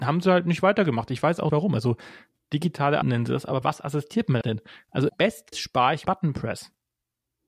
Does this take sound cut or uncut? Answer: cut